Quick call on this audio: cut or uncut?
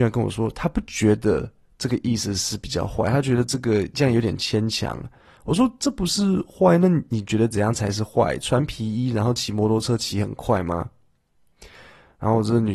uncut